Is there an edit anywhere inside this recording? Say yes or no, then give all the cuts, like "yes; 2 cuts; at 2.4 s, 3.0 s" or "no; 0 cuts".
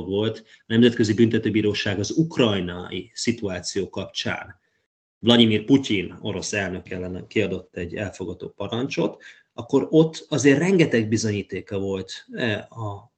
no; 0 cuts